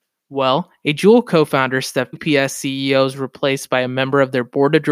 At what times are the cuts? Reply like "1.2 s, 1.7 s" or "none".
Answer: 2.1 s